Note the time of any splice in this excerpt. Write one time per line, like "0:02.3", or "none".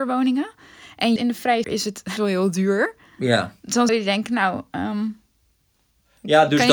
0:01.2
0:01.6
0:02.2
0:03.9